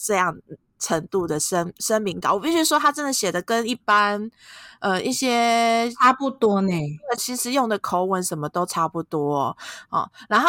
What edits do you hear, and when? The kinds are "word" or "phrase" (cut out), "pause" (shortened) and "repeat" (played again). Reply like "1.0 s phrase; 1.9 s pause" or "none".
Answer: 7.2 s phrase